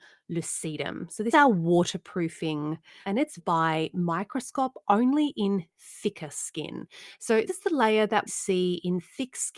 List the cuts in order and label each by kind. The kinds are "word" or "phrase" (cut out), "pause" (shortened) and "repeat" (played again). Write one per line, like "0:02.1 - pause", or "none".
0:01.3 - word
0:03.0 - word
0:03.4 - word
0:07.5 - word
0:08.3 - word